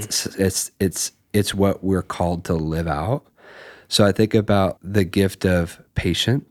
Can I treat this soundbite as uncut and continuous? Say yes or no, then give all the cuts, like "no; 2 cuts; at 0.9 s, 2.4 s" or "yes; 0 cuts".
no; 1 cut; at 4.8 s